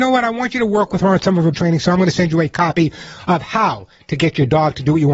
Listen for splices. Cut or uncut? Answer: cut